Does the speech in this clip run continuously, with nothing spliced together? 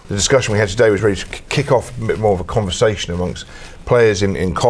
yes; 0 cuts

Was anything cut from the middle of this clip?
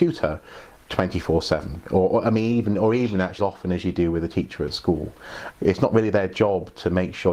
yes; 2 cuts; at 3.4 s, 5.5 s

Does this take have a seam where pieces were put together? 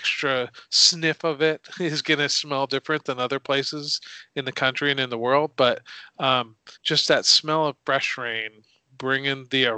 yes; 1 cut; at 6.7 s

